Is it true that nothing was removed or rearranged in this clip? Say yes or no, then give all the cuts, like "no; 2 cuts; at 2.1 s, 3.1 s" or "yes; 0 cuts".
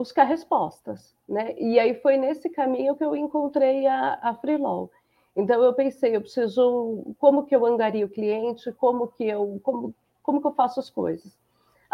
yes; 0 cuts